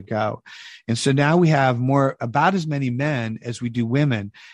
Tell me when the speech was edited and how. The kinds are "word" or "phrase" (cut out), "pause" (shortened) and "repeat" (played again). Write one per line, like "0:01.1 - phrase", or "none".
none